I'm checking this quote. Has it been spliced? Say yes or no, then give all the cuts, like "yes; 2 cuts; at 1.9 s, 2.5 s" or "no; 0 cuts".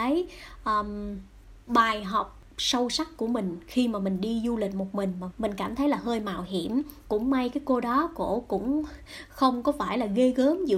yes; 1 cut; at 5.3 s